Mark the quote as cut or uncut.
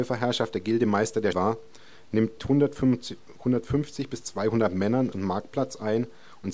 cut